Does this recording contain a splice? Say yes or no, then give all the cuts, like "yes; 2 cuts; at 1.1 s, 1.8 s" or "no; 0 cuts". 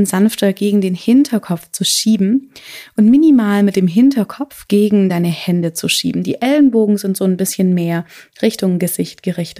no; 0 cuts